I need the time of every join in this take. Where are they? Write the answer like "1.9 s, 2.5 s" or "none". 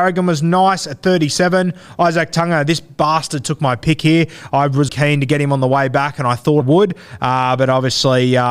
4.9 s, 6.6 s

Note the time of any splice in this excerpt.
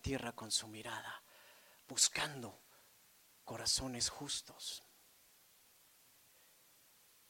none

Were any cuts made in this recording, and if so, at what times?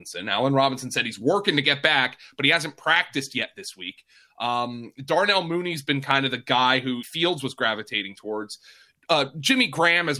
7.0 s

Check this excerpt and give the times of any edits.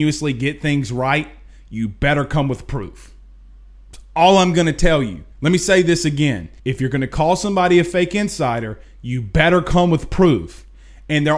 5.3 s, 6.6 s

